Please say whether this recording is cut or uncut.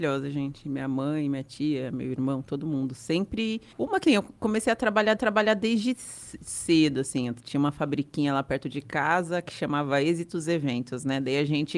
cut